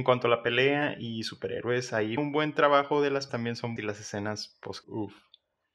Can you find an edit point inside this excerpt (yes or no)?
yes